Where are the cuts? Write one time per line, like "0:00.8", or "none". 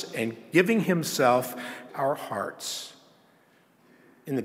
0:01.9